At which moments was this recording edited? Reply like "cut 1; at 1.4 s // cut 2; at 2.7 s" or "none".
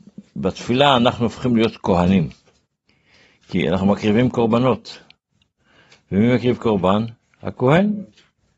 none

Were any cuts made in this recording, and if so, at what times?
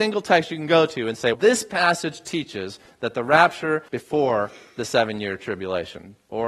cut 1; at 1.3 s // cut 2; at 3.9 s

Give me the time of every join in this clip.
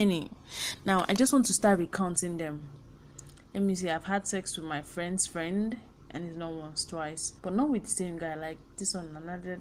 cut 1; at 5.9 s // cut 2; at 7.4 s

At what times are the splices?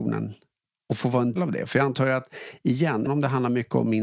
cut 1; at 1.4 s // cut 2; at 3.1 s

